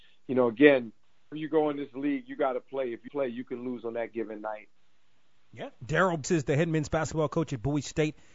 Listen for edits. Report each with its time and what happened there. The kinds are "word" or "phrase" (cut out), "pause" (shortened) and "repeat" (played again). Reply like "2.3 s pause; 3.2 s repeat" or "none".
1.3 s word; 3.1 s word; 6.2 s word